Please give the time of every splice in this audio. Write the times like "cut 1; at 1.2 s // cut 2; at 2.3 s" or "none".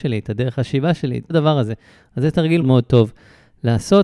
cut 1; at 1.3 s // cut 2; at 2.6 s